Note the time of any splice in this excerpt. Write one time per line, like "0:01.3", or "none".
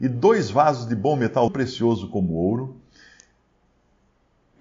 0:01.5